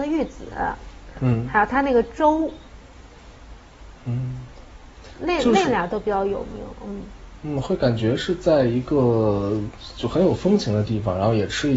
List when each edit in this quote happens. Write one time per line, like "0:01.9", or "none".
none